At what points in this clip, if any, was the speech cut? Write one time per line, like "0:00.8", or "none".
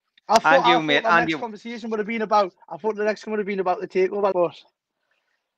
0:02.6
0:03.2
0:04.3